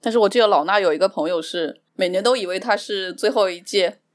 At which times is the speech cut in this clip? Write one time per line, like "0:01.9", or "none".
0:01.9